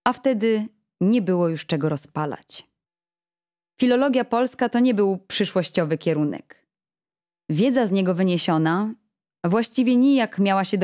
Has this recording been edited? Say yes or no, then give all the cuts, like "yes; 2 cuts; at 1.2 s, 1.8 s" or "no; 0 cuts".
no; 0 cuts